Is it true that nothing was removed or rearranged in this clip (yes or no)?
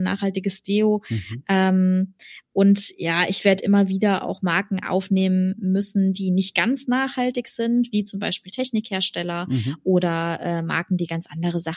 yes